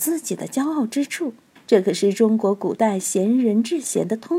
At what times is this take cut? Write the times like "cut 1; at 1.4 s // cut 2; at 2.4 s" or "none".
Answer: cut 1; at 1.6 s